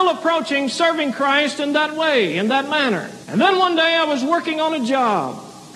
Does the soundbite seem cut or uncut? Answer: cut